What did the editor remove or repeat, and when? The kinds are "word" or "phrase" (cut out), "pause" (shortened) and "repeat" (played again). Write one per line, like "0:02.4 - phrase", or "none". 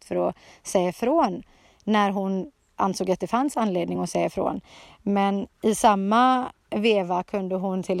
none